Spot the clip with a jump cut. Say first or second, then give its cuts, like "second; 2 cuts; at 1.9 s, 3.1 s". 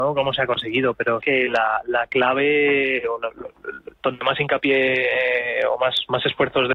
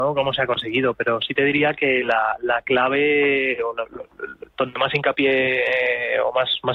first; 1 cut; at 1.2 s